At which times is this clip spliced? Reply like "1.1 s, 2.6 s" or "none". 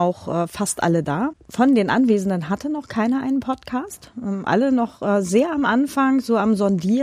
4.5 s